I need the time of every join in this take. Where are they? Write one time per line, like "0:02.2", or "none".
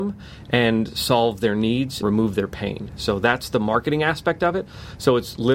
0:02.0